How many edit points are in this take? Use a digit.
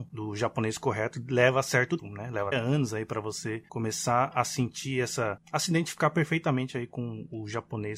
3